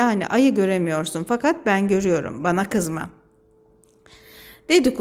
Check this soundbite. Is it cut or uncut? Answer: uncut